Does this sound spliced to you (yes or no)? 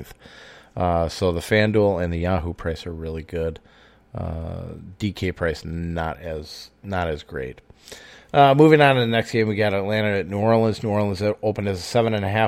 no